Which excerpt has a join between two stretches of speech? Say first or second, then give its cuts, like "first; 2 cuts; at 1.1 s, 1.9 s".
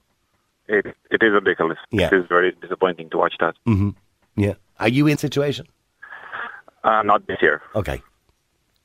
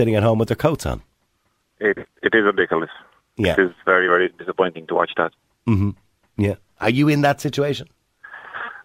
first; 5 cuts; at 1.8 s, 2.3 s, 3.6 s, 5.2 s, 7.7 s